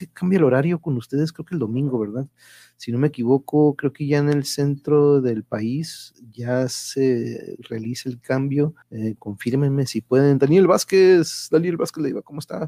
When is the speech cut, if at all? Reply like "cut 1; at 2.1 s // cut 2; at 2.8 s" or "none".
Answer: cut 1; at 8.8 s